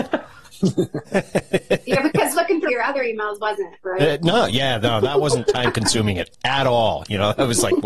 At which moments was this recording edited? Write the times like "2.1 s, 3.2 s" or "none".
2.7 s